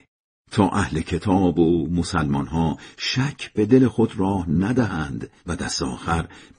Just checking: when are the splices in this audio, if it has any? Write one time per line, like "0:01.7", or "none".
0:05.4

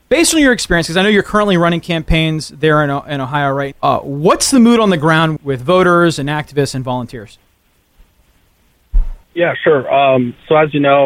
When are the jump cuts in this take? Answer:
0:03.7
0:05.4
0:09.2

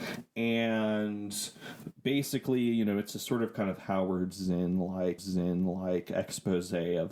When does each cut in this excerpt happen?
0:05.2

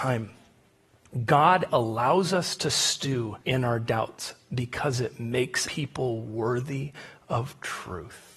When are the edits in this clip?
0:01.7
0:03.4
0:05.6

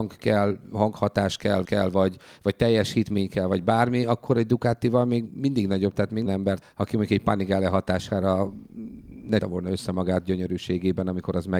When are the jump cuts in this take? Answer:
0:01.6
0:06.3
0:06.6
0:09.4

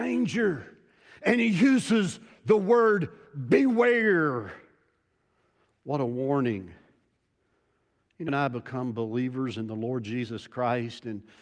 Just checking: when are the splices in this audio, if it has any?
0:08.3

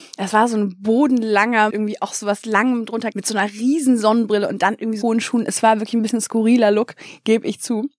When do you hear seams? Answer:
0:01.7
0:03.1
0:05.0

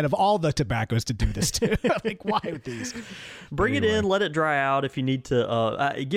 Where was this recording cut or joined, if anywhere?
0:02.0

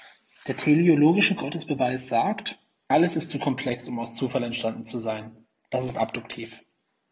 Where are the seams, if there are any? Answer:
none

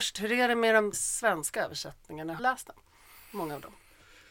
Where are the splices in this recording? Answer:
0:00.9
0:02.4

